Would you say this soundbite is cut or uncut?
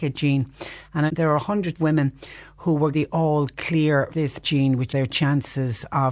cut